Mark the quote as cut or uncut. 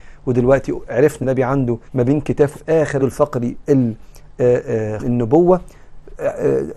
cut